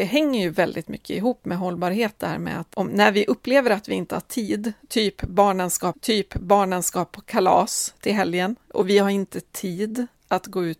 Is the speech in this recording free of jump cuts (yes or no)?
no